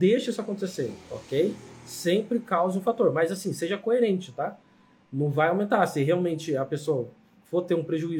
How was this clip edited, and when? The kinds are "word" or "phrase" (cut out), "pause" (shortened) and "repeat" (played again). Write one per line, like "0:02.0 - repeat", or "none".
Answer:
none